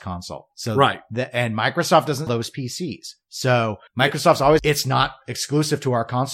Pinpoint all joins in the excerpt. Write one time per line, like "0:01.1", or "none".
0:02.3
0:03.9
0:04.6